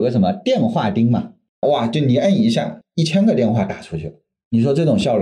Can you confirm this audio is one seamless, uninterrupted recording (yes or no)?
yes